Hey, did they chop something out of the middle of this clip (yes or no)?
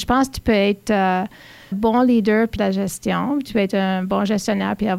yes